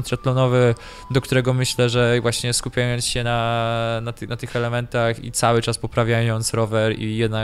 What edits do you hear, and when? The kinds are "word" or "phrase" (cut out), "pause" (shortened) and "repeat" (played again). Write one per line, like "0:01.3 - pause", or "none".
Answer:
none